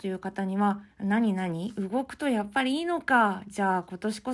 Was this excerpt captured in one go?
no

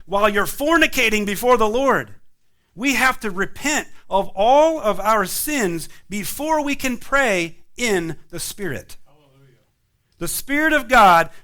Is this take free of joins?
yes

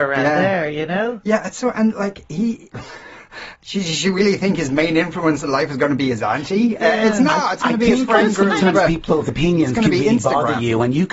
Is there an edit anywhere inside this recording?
no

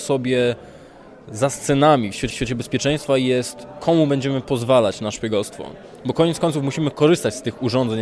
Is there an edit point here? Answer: yes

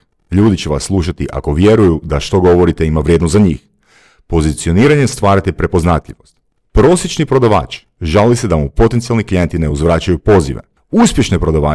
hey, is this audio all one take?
yes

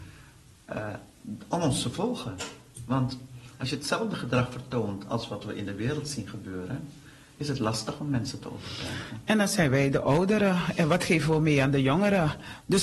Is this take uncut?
yes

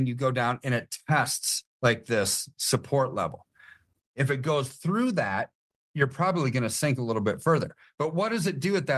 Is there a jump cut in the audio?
no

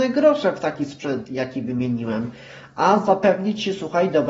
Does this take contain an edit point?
no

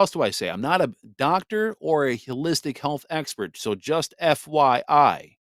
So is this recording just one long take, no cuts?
yes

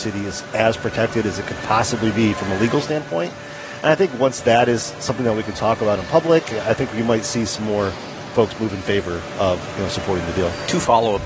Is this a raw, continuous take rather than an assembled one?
yes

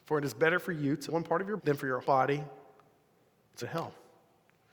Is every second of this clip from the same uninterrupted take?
no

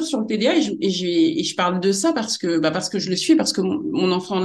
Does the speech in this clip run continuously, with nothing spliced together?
yes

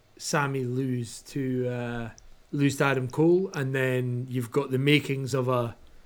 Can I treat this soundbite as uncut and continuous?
no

